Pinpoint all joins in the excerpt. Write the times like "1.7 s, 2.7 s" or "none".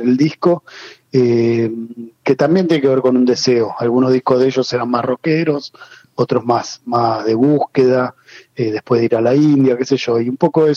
none